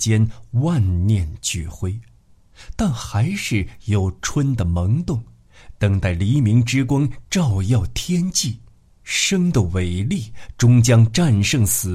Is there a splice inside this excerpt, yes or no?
yes